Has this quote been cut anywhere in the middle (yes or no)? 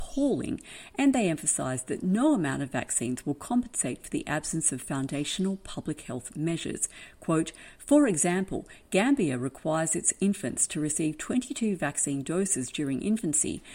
no